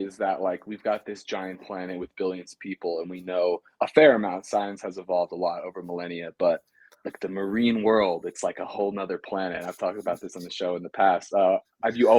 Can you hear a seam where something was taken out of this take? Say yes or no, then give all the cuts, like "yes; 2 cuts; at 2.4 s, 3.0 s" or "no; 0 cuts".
no; 0 cuts